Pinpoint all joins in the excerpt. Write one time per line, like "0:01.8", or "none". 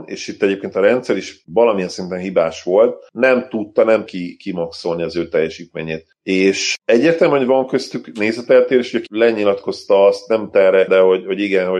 0:04.1
0:09.1
0:10.5
0:10.9